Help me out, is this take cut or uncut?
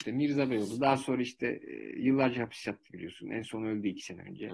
uncut